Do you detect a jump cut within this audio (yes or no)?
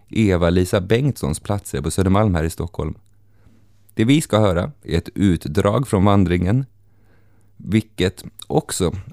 no